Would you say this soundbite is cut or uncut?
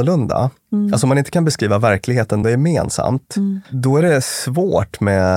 cut